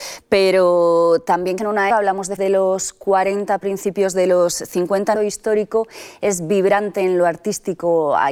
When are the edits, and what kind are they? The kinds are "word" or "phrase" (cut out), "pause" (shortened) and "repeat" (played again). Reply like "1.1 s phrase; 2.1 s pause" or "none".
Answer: 1.6 s phrase; 1.9 s word; 2.4 s word; 5.2 s phrase